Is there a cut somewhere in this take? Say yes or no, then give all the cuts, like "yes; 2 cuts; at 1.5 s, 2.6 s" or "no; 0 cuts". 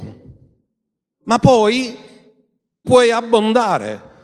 yes; 1 cut; at 2.8 s